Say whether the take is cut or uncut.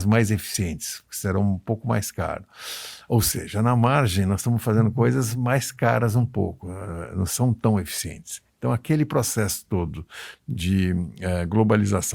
uncut